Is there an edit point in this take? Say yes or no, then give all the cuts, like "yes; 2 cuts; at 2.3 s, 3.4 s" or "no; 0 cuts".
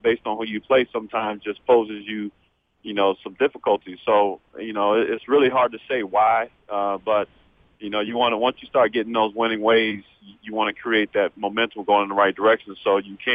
no; 0 cuts